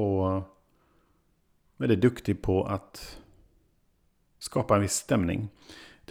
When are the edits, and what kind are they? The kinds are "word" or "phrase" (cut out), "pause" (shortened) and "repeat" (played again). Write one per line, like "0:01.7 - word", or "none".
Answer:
none